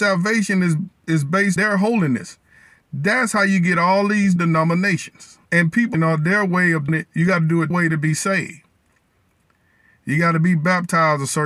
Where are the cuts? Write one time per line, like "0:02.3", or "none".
0:01.6
0:04.4
0:05.5
0:05.9
0:06.9
0:07.7